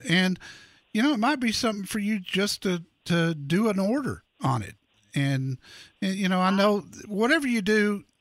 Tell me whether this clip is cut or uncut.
uncut